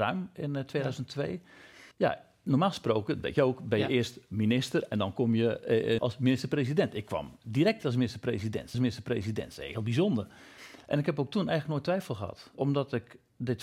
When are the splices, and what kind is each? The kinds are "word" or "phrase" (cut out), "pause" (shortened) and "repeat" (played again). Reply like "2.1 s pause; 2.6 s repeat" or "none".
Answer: 1.9 s pause; 6.0 s phrase; 8.7 s repeat; 12.6 s word

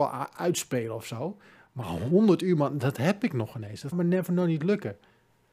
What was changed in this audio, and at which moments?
3.9 s word

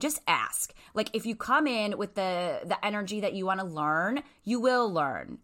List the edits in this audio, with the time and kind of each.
none

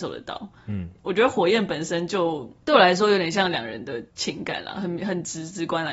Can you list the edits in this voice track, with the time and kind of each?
4.1 s pause

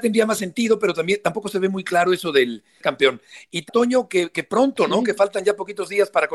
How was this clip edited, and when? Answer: 2.8 s phrase; 3.7 s word

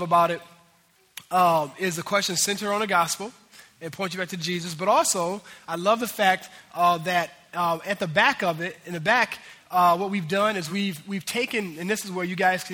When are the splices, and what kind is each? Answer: none

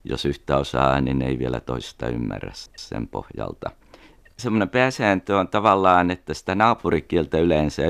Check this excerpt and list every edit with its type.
none

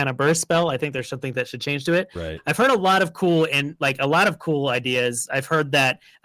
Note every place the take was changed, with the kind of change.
none

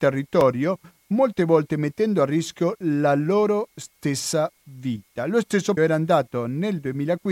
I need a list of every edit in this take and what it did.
5.8 s word

